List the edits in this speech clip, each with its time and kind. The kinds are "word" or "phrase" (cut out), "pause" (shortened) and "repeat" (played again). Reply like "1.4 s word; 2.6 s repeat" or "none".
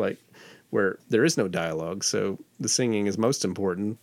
none